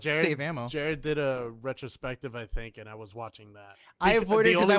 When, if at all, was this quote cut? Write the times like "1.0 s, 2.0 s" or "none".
none